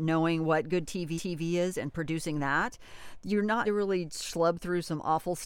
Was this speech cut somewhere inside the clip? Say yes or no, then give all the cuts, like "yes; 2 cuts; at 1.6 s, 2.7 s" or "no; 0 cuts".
yes; 3 cuts; at 1.2 s, 3.6 s, 4.1 s